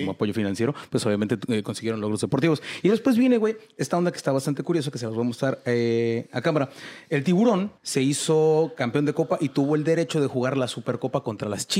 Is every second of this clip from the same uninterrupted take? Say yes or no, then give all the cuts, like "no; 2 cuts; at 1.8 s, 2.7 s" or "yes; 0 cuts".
no; 1 cut; at 7.8 s